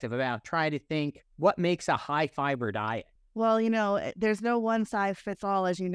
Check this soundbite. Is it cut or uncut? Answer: cut